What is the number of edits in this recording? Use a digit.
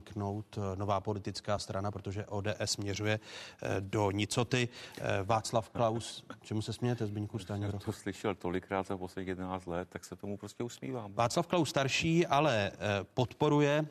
0